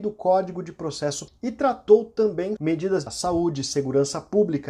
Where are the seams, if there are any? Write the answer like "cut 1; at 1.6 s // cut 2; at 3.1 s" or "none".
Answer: cut 1; at 1.3 s // cut 2; at 2.6 s // cut 3; at 3.1 s